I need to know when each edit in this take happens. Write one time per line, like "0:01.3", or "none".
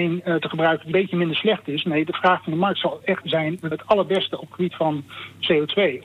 0:00.9
0:03.2
0:03.7